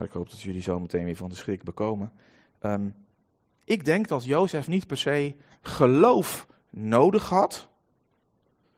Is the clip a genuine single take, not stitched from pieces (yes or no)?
yes